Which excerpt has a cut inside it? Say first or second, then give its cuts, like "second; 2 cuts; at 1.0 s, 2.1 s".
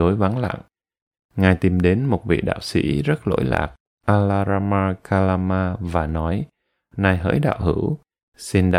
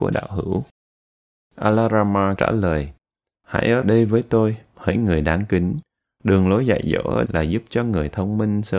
second; 3 cuts; at 2.4 s, 3.8 s, 7.3 s